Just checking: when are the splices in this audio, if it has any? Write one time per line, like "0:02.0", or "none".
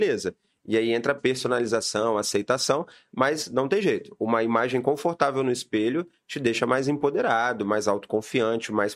none

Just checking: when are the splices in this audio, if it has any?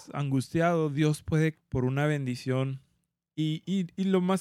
0:01.5

